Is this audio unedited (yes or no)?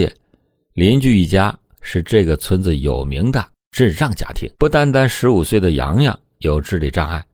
no